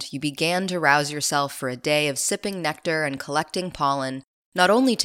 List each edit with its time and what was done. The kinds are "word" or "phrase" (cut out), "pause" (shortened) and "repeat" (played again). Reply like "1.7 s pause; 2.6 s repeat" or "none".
none